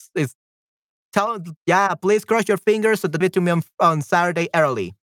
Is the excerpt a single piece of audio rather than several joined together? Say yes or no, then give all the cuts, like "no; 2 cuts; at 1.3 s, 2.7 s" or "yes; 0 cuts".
no; 2 cuts; at 1.6 s, 3.2 s